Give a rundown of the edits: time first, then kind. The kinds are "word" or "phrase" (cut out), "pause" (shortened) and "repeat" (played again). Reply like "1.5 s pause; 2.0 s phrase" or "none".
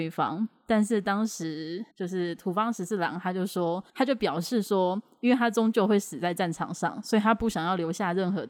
1.9 s pause; 3.9 s pause